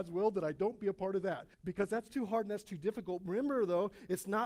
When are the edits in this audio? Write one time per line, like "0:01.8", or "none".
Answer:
0:01.5